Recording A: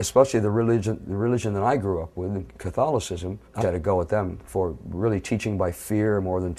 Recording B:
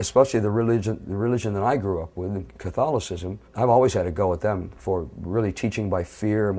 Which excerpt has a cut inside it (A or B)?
A